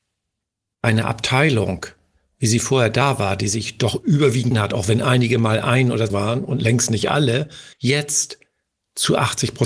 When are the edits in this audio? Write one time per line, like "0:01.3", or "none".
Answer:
0:04.5
0:06.1
0:07.7